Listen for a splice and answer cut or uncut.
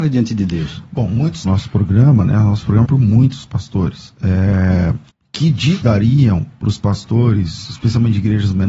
cut